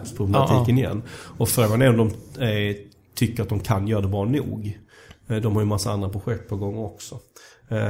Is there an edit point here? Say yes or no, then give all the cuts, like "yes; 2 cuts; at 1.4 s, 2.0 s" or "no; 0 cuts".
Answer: no; 0 cuts